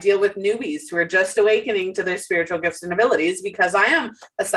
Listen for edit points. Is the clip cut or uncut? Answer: uncut